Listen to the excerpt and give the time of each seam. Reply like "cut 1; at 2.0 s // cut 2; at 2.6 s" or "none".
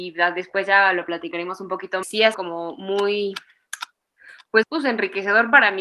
cut 1; at 2.0 s // cut 2; at 2.3 s // cut 3; at 4.6 s